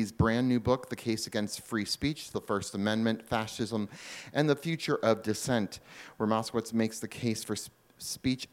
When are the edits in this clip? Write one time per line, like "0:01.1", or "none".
none